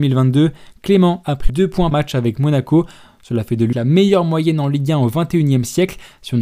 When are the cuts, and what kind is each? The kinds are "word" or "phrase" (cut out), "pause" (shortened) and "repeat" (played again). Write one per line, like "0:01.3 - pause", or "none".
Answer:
0:01.5 - phrase
0:01.9 - word
0:03.7 - phrase

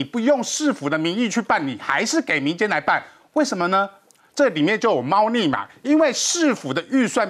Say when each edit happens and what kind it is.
none

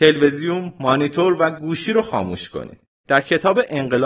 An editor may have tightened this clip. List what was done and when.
0:03.0 - pause

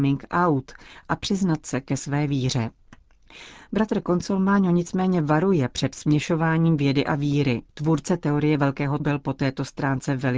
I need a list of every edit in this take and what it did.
0:07.7 - pause
0:09.0 - word

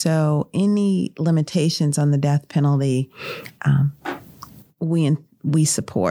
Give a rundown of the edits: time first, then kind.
none

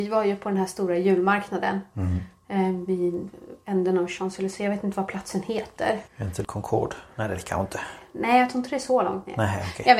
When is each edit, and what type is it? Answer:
0:06.1 - pause
0:06.4 - word

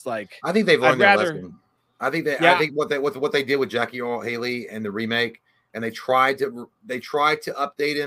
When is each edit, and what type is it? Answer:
0:04.7 - word

